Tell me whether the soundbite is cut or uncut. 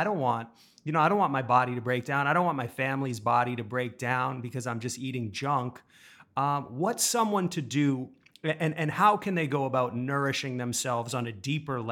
uncut